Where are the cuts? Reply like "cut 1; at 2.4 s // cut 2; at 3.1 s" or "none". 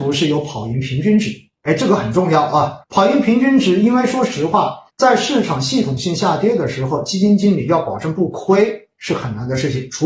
cut 1; at 2.8 s // cut 2; at 4.9 s